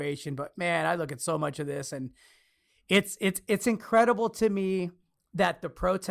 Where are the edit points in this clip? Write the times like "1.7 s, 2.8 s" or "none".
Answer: none